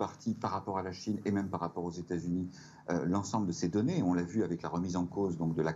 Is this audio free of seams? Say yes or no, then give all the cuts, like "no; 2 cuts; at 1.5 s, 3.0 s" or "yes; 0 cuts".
yes; 0 cuts